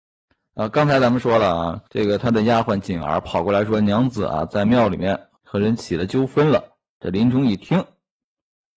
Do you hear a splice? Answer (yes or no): yes